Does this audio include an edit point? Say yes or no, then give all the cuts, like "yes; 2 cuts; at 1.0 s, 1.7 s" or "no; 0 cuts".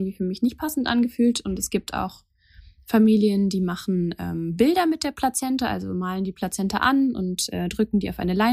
no; 0 cuts